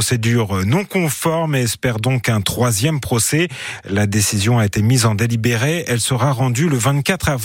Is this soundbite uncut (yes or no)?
yes